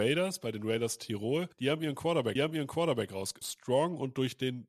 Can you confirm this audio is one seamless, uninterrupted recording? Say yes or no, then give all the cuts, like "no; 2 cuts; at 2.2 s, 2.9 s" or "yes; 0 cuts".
no; 3 cuts; at 1.5 s, 2.4 s, 3.4 s